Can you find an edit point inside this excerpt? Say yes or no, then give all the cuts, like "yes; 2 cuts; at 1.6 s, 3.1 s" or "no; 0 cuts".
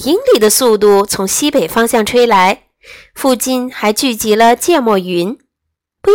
no; 0 cuts